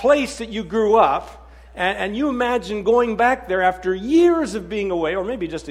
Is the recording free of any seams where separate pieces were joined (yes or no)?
yes